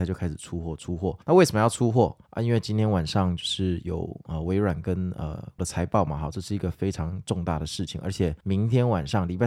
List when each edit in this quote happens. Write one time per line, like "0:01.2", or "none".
0:01.2
0:02.3
0:05.6
0:08.4

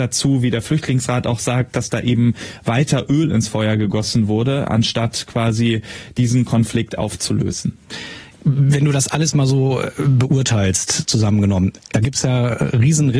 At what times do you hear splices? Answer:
none

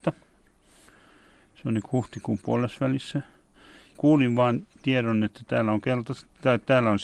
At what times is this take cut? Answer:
0:03.9

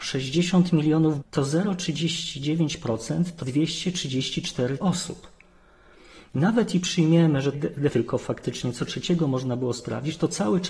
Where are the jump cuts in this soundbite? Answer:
0:01.2
0:03.4
0:04.8
0:06.7
0:07.5
0:07.9

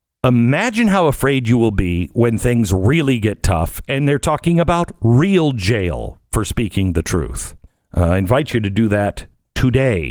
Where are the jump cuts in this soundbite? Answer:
0:07.7

